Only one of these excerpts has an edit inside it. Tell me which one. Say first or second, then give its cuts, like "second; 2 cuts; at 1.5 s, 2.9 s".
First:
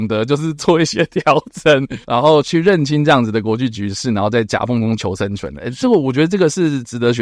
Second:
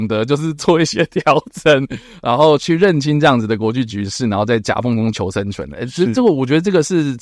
first; 2 cuts; at 2.0 s, 5.8 s